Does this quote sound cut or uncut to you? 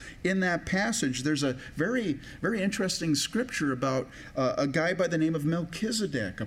uncut